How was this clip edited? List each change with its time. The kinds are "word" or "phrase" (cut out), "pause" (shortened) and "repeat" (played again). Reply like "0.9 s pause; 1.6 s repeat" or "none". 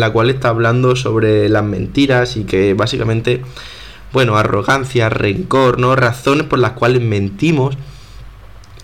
none